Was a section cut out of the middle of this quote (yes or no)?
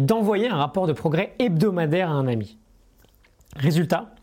no